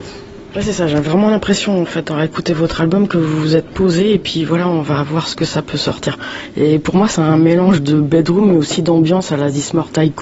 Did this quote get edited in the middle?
no; 0 cuts

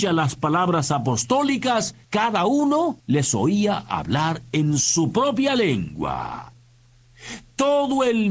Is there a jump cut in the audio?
yes; 2 cuts; at 2.0 s, 3.0 s

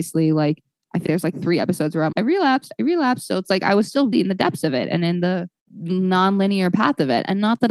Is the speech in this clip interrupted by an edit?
yes; 4 cuts; at 1.1 s, 2.1 s, 4.1 s, 5.6 s

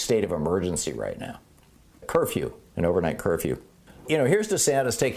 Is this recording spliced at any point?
no; 0 cuts

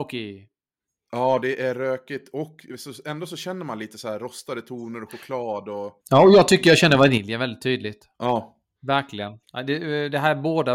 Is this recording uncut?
no; 3 cuts; at 6.0 s, 8.1 s, 9.4 s

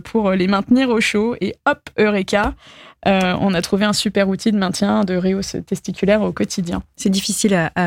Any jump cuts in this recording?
no; 0 cuts

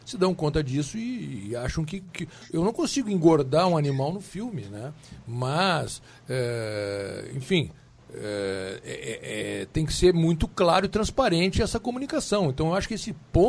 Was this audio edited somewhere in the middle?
no; 0 cuts

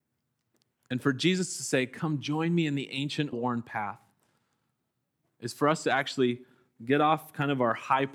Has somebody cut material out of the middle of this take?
yes; 1 cut; at 3.3 s

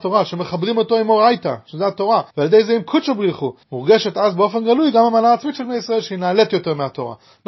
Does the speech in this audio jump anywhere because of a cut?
yes; 2 cuts; at 2.3 s, 3.6 s

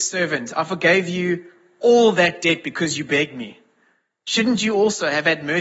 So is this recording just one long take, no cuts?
yes; 0 cuts

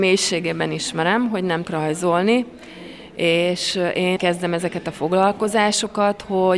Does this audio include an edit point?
yes; 2 cuts; at 1.6 s, 4.2 s

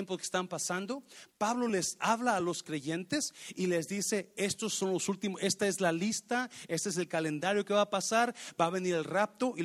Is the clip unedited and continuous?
yes; 0 cuts

